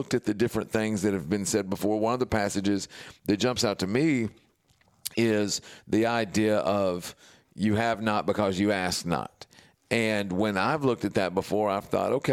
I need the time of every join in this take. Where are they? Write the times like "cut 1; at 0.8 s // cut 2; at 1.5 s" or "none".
none